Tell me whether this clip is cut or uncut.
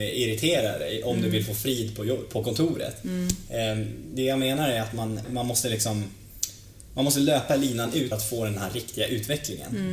cut